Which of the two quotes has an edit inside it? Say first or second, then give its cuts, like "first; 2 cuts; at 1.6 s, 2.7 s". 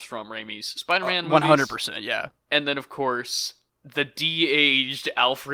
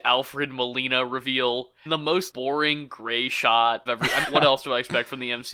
second; 4 cuts; at 1.9 s, 2.3 s, 3.9 s, 4.2 s